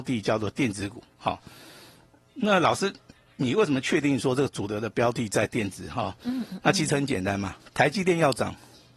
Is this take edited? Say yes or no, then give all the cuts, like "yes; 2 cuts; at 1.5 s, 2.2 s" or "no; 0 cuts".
no; 0 cuts